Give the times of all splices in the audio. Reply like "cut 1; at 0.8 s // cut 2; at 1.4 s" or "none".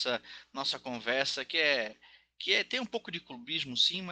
none